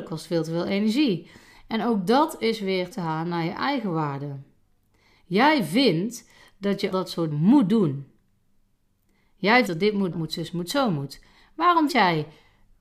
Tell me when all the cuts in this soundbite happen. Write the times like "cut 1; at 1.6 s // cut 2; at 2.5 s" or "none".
cut 1; at 2.9 s // cut 2; at 6.9 s // cut 3; at 7.3 s // cut 4; at 9.7 s // cut 5; at 10.1 s // cut 6; at 11.9 s